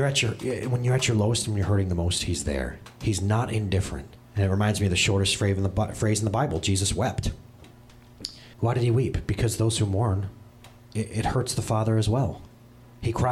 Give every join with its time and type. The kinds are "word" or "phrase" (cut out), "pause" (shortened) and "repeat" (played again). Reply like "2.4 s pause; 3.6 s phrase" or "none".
4.2 s pause; 8.5 s pause